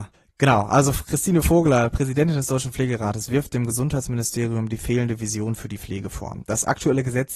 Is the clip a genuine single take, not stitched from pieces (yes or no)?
yes